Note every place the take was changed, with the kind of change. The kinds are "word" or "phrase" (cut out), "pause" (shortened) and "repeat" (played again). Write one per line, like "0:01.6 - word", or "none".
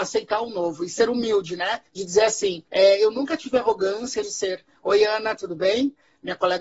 0:01.9 - pause
0:02.7 - pause
0:04.2 - phrase